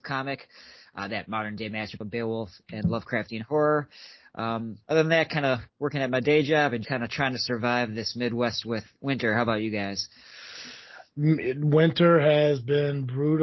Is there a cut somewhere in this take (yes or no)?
yes